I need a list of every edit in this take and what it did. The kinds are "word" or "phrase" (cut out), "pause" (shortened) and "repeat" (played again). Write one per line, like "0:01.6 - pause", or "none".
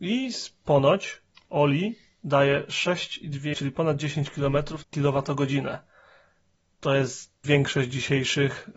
0:01.4 - pause
0:03.5 - word
0:04.8 - word
0:07.4 - phrase